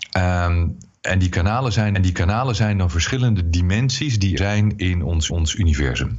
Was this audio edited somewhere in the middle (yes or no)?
yes